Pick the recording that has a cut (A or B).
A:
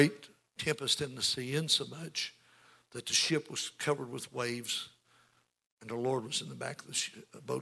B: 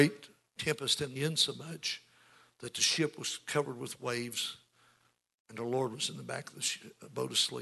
B